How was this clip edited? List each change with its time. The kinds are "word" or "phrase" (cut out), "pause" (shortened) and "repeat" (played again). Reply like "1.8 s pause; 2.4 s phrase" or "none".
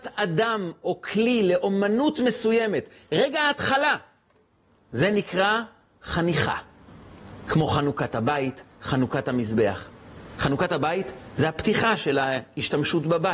none

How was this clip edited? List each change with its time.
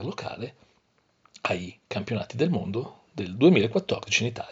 none

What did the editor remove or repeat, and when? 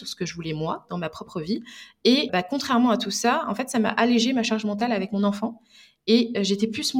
2.3 s word

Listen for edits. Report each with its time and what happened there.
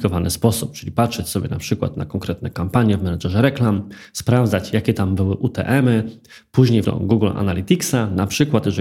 6.8 s word

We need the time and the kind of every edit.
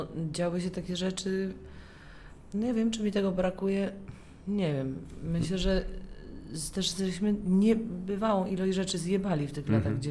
none

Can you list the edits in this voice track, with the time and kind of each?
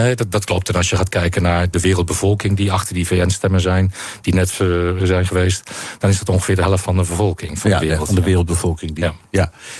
5.0 s word

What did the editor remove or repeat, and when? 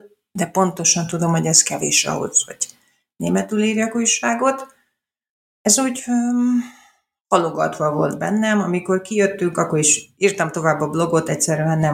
none

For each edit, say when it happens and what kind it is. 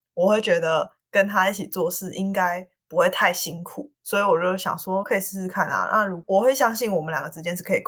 5.0 s word

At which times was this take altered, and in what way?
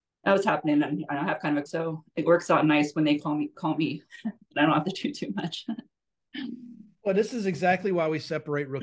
1.7 s word

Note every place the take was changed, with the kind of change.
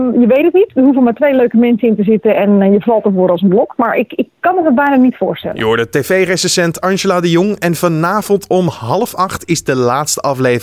none

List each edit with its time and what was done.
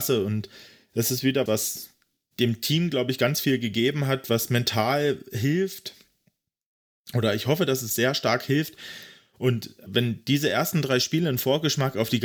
1.5 s word; 9.9 s word

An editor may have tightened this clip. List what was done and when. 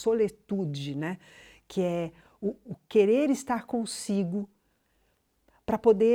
2.6 s word

